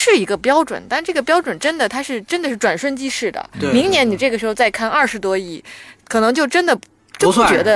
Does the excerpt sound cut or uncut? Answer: uncut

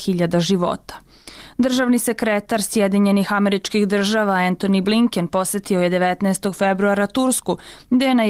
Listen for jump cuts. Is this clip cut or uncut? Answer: uncut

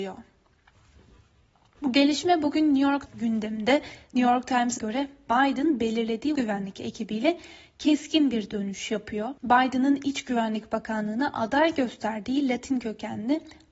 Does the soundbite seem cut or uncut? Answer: cut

